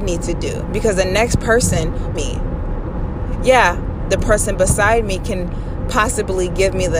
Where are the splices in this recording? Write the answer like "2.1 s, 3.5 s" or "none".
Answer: 2.2 s